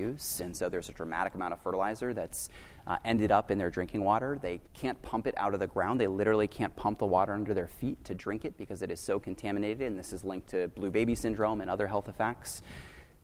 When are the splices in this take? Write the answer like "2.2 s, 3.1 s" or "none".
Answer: 4.7 s